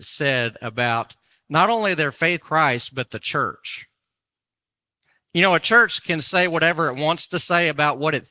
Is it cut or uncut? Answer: cut